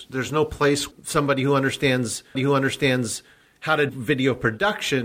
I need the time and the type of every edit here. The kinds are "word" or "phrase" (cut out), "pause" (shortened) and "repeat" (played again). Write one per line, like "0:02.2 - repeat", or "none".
0:00.9 - word
0:02.3 - repeat
0:03.9 - word